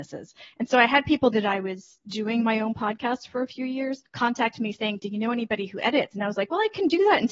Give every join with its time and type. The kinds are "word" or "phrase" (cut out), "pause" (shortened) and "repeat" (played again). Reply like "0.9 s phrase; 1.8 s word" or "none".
1.3 s phrase; 4.1 s pause